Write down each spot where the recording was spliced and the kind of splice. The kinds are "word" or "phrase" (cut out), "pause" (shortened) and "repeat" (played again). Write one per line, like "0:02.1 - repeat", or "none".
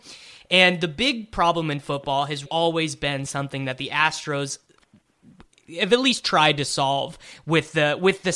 0:02.5 - word